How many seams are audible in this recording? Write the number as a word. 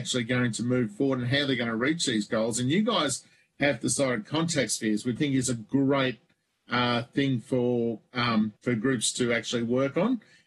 two